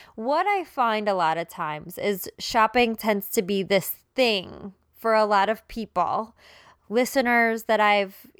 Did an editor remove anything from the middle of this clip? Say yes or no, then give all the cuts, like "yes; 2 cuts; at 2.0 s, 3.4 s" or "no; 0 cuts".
no; 0 cuts